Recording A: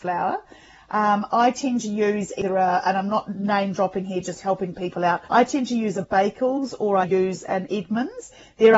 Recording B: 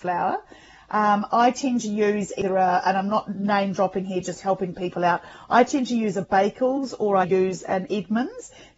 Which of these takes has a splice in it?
A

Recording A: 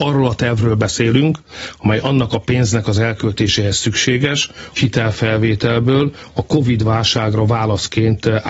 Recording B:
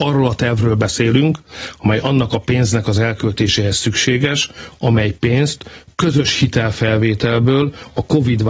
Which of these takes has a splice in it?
A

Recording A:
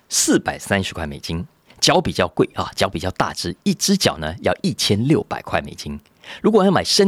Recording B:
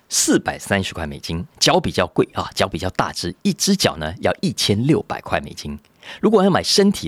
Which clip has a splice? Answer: B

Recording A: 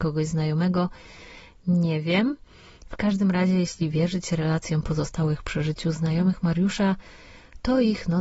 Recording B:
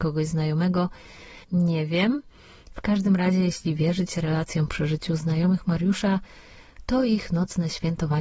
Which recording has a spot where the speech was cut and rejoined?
B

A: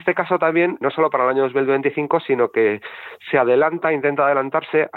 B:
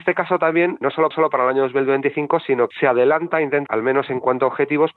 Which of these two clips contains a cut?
B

